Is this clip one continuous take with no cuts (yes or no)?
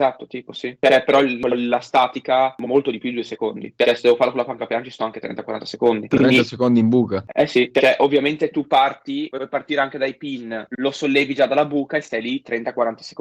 yes